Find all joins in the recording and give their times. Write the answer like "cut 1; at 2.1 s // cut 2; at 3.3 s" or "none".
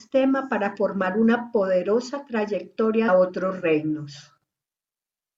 cut 1; at 3.1 s

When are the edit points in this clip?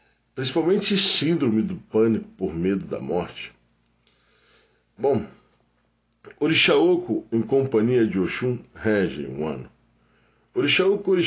none

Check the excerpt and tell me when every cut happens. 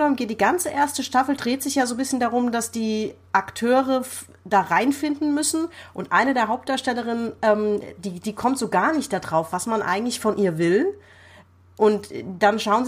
none

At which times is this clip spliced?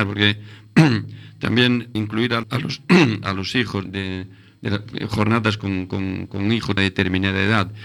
cut 1; at 2.0 s // cut 2; at 2.4 s // cut 3; at 3.9 s // cut 4; at 5.6 s // cut 5; at 6.8 s

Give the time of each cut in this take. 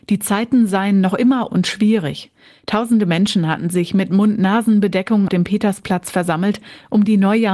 cut 1; at 1.5 s // cut 2; at 5.3 s

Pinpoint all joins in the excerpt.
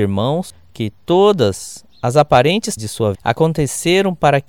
cut 1; at 2.8 s // cut 2; at 3.1 s

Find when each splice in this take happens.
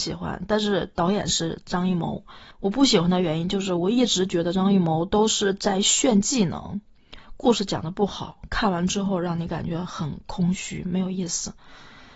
cut 1; at 2.5 s

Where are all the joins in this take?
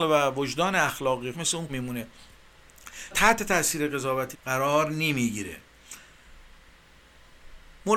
cut 1; at 1.3 s // cut 2; at 1.7 s // cut 3; at 3.1 s // cut 4; at 4.3 s

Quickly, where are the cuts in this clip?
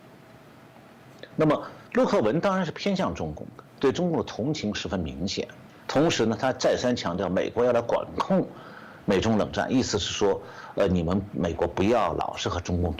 cut 1; at 1.9 s // cut 2; at 3.7 s // cut 3; at 5.7 s

